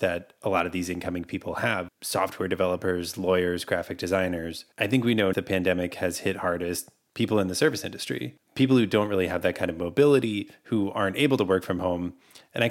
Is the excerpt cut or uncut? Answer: cut